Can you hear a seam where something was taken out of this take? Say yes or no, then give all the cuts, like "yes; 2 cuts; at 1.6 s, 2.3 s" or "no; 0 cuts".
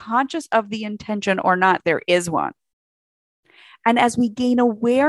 no; 0 cuts